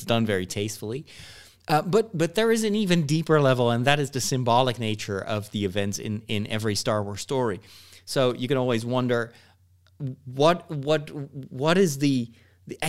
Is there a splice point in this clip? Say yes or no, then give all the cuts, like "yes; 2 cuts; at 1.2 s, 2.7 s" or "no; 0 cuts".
no; 0 cuts